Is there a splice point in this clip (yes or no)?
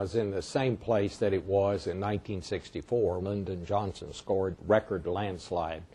yes